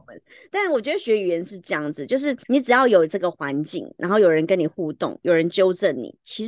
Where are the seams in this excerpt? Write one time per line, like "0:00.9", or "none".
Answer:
0:02.4